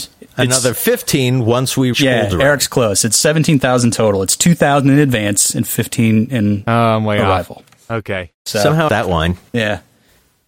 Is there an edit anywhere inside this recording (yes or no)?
yes